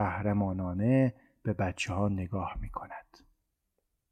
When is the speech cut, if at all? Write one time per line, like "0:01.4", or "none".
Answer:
none